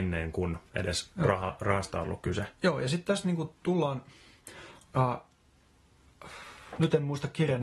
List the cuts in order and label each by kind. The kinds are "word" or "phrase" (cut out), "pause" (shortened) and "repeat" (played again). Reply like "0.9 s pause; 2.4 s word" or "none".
none